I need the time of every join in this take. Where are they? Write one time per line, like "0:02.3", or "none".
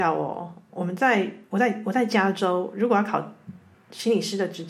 0:03.7